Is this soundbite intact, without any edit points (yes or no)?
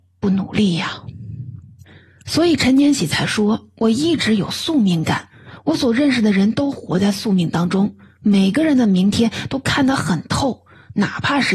yes